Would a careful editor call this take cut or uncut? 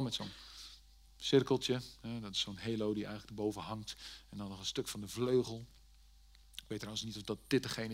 uncut